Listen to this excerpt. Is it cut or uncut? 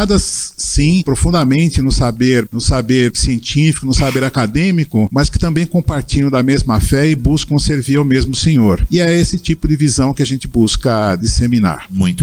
uncut